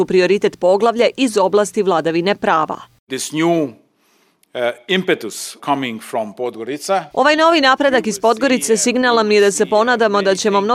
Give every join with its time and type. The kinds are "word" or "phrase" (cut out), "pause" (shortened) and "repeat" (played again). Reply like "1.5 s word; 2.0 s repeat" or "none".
5.6 s word; 7.1 s pause